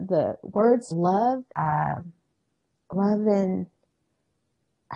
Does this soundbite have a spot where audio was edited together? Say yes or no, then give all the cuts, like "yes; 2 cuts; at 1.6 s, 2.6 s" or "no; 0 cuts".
yes; 2 cuts; at 0.9 s, 1.5 s